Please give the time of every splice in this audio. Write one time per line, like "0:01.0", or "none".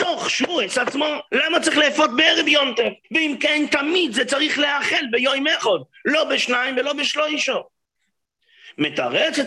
0:01.3
0:03.0

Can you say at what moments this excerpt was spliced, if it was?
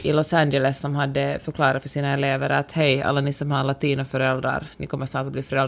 none

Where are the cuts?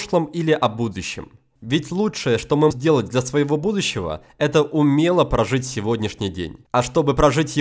0:02.7
0:06.6

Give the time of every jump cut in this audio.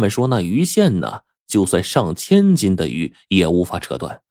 none

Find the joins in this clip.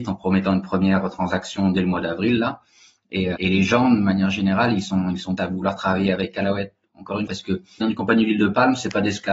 0:03.4
0:05.4
0:07.3
0:07.8

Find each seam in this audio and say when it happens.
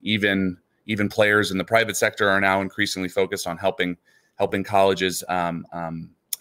none

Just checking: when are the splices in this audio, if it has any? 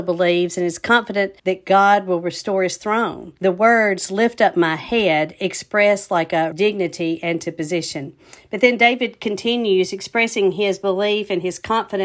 0:01.4
0:03.4
0:06.5

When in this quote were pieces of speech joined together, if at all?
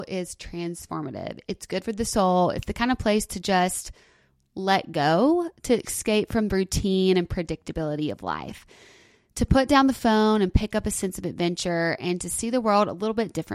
none

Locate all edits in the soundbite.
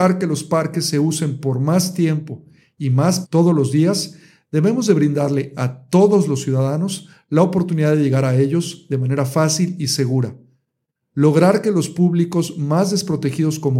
0:03.2

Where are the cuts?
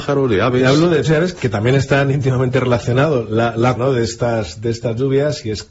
0:01.0
0:03.8

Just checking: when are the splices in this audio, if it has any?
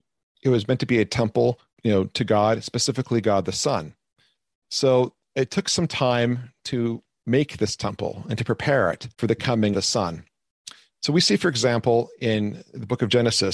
0:01.7
0:09.1
0:09.7

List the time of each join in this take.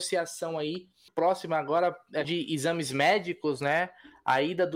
0:01.1
0:02.2

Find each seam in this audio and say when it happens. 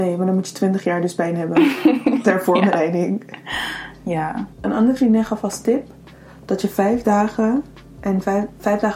none

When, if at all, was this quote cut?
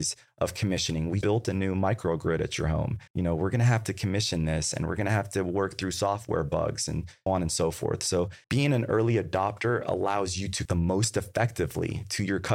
0:01.2
0:03.1
0:07.3
0:08.4
0:10.7

